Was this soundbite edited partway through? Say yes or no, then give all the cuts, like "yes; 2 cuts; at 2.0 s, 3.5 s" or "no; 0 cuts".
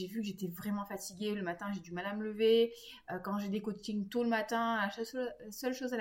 no; 0 cuts